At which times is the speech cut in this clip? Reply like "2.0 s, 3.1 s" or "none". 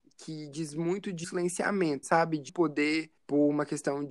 1.2 s, 2.0 s, 2.5 s, 3.2 s